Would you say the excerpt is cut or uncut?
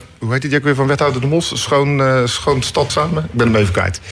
cut